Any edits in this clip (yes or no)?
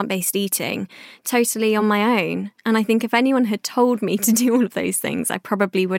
no